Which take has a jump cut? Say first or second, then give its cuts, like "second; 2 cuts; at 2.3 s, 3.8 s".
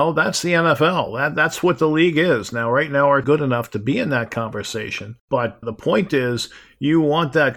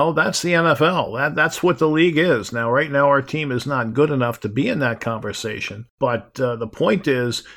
first; 2 cuts; at 3.2 s, 5.6 s